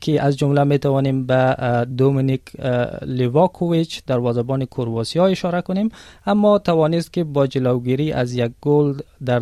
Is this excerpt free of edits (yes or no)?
yes